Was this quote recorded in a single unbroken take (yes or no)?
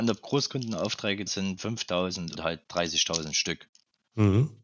no